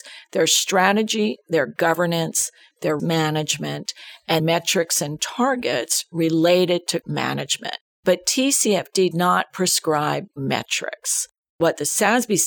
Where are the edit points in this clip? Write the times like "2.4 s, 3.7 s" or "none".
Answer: 3.0 s, 4.4 s, 7.0 s, 7.9 s, 9.1 s, 10.3 s